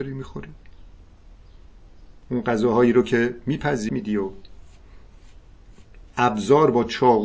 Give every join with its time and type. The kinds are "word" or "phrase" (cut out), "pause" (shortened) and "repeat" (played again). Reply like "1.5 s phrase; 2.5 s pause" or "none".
3.9 s phrase; 6.1 s word